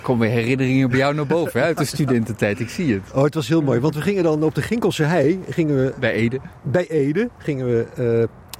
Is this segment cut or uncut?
uncut